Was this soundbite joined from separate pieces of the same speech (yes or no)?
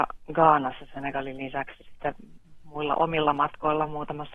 yes